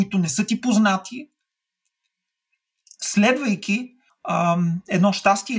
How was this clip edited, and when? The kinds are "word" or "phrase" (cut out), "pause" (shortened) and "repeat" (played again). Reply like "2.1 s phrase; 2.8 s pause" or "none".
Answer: 4.1 s pause